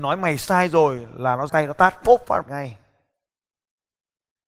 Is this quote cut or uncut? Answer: cut